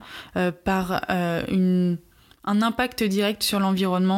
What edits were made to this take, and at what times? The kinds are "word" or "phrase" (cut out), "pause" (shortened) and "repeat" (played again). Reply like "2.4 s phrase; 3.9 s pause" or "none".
none